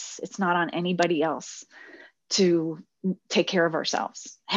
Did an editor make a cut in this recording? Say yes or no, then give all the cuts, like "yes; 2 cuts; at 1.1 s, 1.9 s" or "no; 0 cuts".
no; 0 cuts